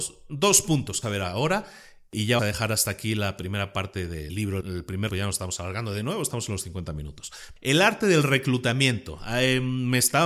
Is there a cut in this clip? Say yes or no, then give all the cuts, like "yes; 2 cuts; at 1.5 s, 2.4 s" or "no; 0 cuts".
yes; 5 cuts; at 1.0 s, 2.4 s, 4.3 s, 4.6 s, 5.1 s